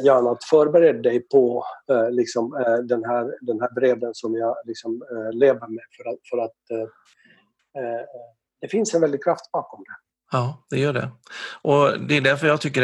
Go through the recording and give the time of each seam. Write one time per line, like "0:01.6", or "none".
none